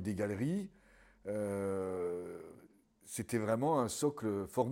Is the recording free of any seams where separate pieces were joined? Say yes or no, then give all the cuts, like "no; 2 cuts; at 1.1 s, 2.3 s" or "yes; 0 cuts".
yes; 0 cuts